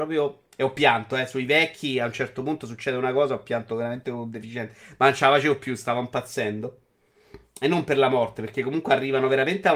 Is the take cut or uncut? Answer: uncut